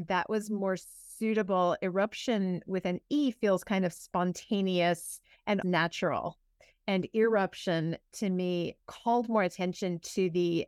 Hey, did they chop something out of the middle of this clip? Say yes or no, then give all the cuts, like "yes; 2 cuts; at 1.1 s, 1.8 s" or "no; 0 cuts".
yes; 2 cuts; at 5.6 s, 8.8 s